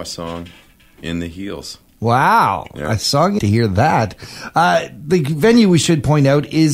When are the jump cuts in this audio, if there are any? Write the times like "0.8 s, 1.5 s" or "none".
3.4 s